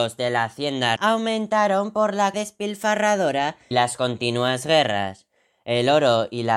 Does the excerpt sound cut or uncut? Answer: cut